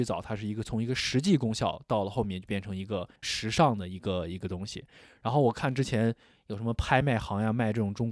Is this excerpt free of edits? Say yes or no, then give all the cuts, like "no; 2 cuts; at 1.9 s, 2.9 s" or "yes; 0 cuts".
no; 1 cut; at 3.2 s